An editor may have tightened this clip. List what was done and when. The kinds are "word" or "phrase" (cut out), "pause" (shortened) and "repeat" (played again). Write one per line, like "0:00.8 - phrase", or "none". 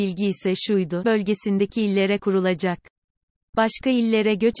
0:01.0 - word
0:02.2 - word

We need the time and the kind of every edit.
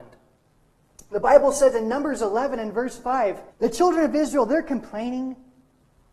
0:03.5 - pause

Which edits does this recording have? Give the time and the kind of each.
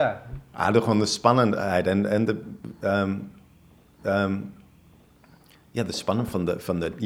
0:04.0 - repeat

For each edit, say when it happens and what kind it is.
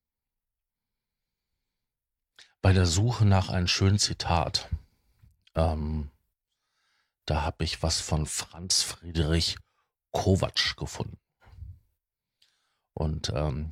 none

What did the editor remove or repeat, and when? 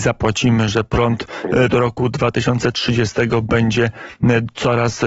0:01.7 - word

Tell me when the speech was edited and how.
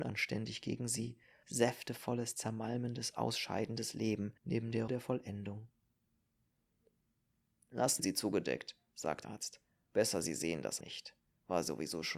0:01.4 - word
0:04.4 - pause
0:04.9 - word
0:08.0 - word
0:09.2 - word
0:10.8 - word

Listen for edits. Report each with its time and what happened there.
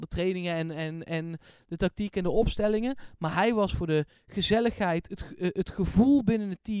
none

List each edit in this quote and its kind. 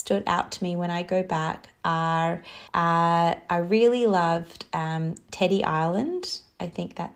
0:02.7 - pause

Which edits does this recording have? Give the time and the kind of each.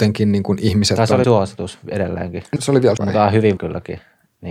0:01.2 - word
0:02.6 - word
0:03.0 - word
0:03.6 - word

